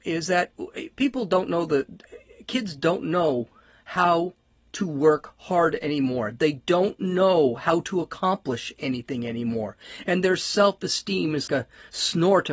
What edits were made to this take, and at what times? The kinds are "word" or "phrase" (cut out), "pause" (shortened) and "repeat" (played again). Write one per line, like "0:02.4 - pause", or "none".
0:11.5 - word